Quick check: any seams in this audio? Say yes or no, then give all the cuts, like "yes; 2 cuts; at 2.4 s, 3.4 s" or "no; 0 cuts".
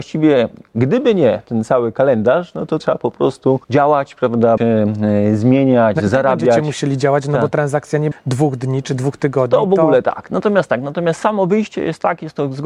yes; 4 cuts; at 2.8 s, 3.6 s, 4.6 s, 8.1 s